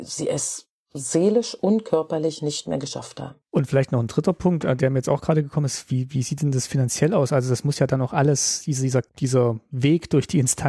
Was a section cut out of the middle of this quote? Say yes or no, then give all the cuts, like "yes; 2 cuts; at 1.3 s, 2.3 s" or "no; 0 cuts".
yes; 2 cuts; at 3.4 s, 9.1 s